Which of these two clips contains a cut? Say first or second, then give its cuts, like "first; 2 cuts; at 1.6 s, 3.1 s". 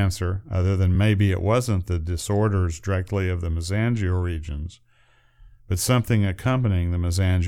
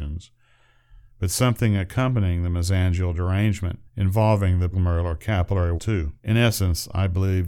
second; 4 cuts; at 3.9 s, 4.7 s, 5.8 s, 6.2 s